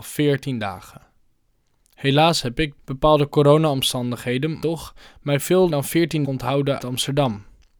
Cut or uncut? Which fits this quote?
cut